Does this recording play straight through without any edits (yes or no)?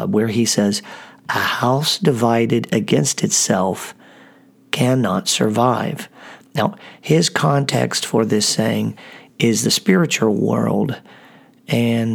yes